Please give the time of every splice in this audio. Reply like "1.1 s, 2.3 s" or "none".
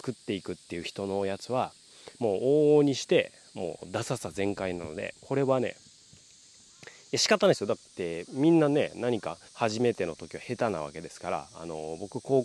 2.1 s, 5.2 s, 9.5 s